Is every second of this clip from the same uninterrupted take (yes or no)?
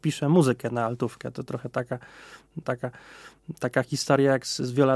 no